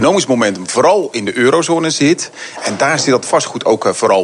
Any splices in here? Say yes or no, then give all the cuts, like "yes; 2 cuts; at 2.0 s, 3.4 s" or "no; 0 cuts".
no; 0 cuts